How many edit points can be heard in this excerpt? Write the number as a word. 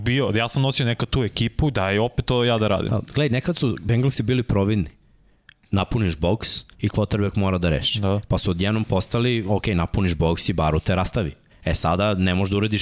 two